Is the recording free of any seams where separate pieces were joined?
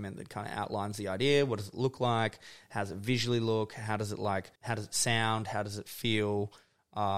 no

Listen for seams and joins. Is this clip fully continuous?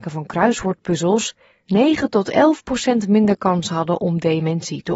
yes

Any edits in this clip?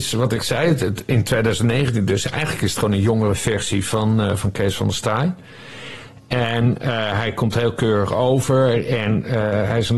no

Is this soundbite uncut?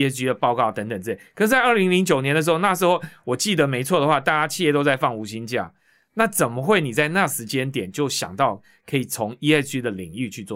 yes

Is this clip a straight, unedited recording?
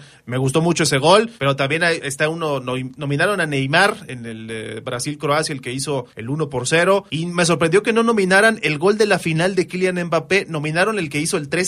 no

